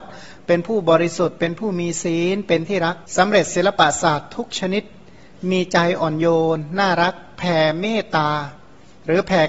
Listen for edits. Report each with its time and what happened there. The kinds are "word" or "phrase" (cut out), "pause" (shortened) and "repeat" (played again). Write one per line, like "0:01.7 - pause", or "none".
0:03.1 - pause